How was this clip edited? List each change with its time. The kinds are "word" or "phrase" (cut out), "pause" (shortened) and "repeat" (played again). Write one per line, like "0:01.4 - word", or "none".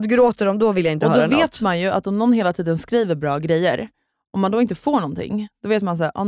none